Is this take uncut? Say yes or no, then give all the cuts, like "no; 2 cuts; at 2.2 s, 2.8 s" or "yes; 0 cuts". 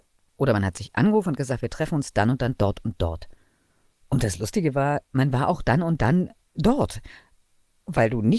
yes; 0 cuts